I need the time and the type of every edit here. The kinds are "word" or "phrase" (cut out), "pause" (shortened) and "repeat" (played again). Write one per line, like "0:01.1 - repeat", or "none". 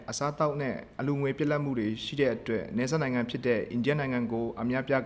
none